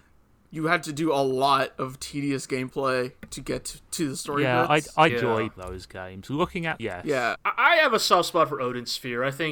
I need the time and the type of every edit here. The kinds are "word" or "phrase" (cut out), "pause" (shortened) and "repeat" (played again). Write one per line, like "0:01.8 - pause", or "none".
0:05.1 - phrase
0:05.6 - word
0:06.8 - word
0:07.4 - word